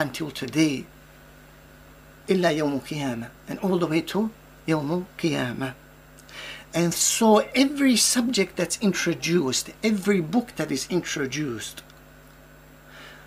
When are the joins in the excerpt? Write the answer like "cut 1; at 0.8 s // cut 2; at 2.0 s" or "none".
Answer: none